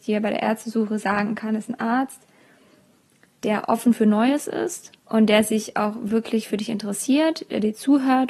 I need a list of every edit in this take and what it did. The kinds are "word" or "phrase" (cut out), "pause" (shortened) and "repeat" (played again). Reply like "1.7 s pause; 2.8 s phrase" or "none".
5.0 s pause